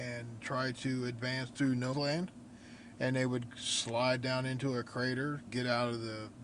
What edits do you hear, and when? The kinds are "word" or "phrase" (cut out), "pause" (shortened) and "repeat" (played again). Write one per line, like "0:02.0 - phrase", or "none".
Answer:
0:01.9 - word
0:05.5 - word